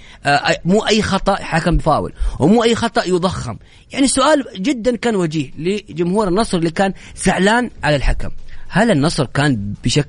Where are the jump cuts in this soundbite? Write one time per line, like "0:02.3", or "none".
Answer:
0:01.8